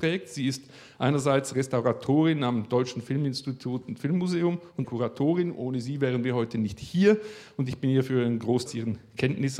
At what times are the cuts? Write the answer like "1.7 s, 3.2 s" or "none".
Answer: 4.8 s, 8.7 s

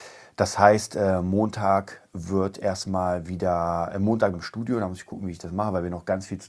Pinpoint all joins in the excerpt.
4.3 s

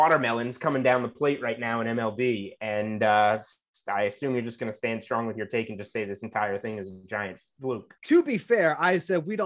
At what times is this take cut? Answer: 8.0 s

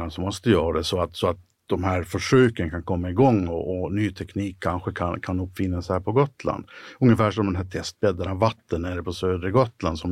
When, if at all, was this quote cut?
none

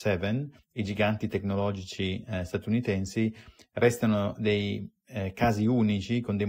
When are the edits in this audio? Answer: none

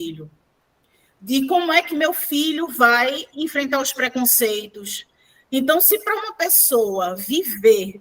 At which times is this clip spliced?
none

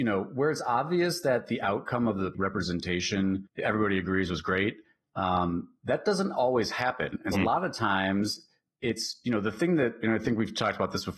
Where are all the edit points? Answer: 7.3 s

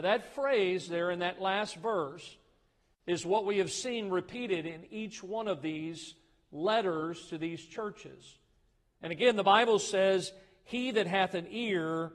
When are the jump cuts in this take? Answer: none

